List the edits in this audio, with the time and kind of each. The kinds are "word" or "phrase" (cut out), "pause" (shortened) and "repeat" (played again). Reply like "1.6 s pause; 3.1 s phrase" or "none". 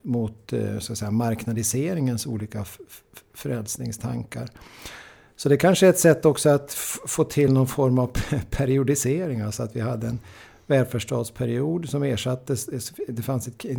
none

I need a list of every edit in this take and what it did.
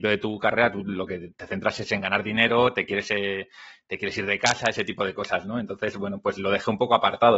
none

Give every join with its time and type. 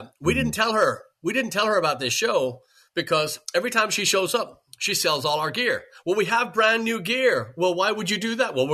3.4 s pause

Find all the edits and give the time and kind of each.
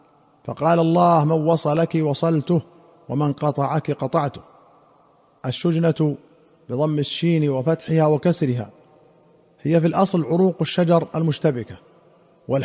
none

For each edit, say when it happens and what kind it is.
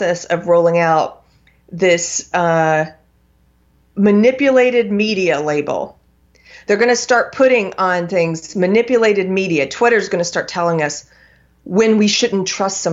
none

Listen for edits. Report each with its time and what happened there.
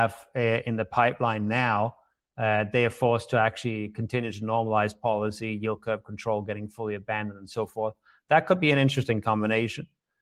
none

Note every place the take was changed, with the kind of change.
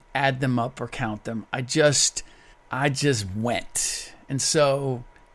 2.5 s pause

